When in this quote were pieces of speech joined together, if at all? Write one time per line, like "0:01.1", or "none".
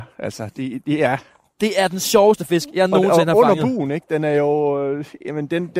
none